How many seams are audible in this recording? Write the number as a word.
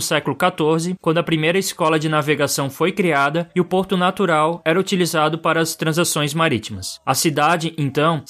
zero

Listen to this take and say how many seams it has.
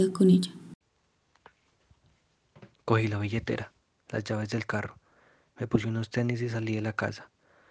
zero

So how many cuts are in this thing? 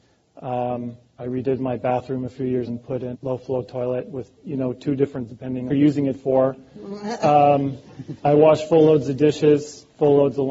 four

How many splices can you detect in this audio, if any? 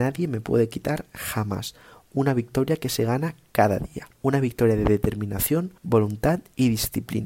two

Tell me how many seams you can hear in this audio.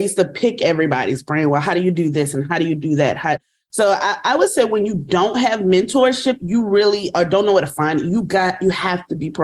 zero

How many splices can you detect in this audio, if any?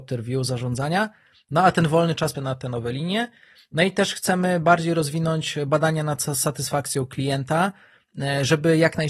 one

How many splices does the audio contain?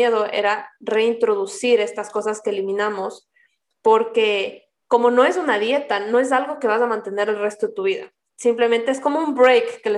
one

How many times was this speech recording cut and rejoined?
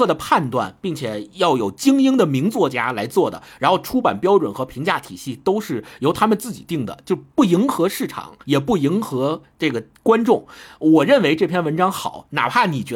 two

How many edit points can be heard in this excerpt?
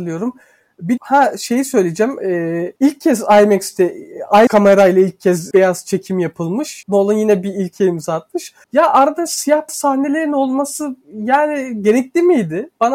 eight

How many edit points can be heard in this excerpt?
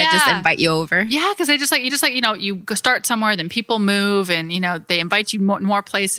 one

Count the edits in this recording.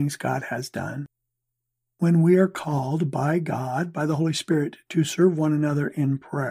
zero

